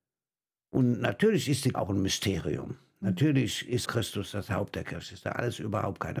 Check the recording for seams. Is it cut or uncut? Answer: cut